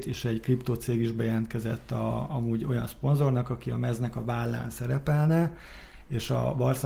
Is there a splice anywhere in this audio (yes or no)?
no